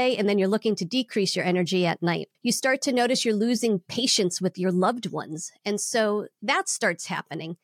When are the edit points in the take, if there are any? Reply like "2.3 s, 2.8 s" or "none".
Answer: 2.3 s